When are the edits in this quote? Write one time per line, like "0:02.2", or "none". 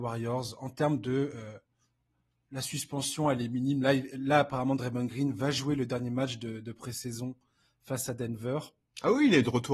none